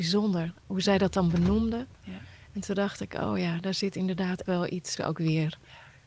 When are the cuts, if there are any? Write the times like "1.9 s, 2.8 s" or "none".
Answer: 4.5 s, 5.0 s